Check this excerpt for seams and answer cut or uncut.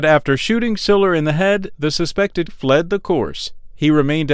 cut